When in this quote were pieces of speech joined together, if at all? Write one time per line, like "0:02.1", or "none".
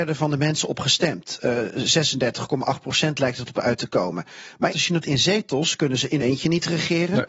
0:04.7
0:05.0
0:06.2